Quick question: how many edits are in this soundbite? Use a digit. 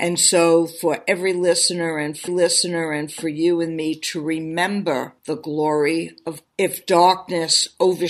3